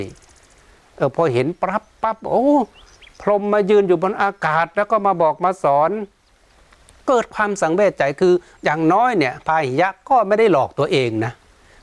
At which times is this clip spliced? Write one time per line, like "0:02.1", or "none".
none